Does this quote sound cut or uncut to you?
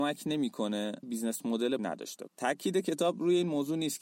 cut